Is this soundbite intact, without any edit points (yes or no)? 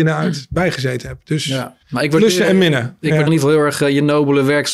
no